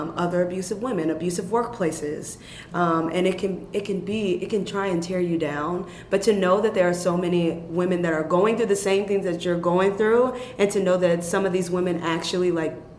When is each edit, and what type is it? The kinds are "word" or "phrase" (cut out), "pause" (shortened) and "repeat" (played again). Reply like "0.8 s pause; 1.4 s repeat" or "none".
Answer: none